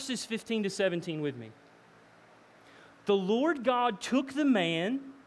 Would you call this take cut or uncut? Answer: uncut